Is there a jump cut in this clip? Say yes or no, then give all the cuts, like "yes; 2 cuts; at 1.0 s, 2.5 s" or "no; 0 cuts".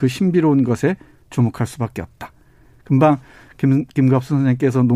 no; 0 cuts